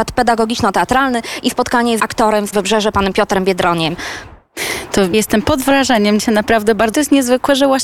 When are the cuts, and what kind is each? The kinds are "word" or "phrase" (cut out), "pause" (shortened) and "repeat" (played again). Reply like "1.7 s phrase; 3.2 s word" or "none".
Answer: 2.0 s word; 2.5 s word; 5.1 s word; 6.2 s word; 6.9 s phrase